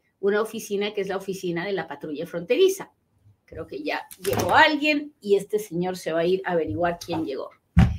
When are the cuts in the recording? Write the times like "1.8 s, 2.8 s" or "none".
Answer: none